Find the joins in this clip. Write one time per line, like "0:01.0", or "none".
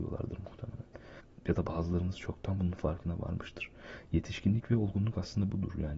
none

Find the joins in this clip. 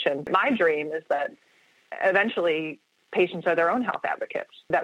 none

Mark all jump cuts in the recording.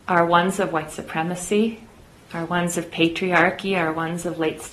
none

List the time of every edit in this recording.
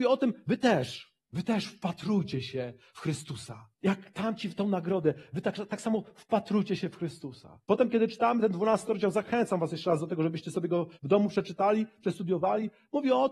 0:01.2
0:03.7
0:07.6
0:10.9

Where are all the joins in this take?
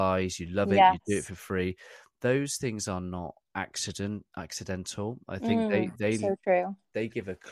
0:03.4

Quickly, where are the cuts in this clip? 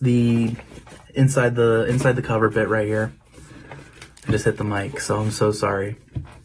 none

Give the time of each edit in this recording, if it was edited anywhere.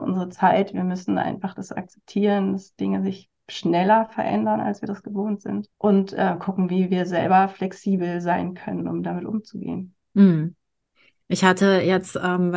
0:05.7

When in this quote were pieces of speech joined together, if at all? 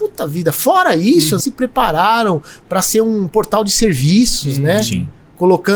0:01.4

